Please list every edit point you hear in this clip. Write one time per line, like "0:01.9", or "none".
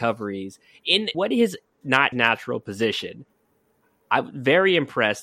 0:01.1
0:01.8
0:02.1